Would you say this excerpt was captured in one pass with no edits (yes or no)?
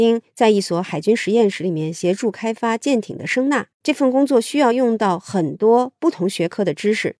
no